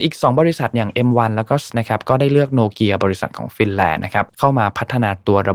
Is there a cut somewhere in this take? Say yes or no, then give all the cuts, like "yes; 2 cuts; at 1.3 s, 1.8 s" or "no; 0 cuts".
yes; 2 cuts; at 1.7 s, 4.3 s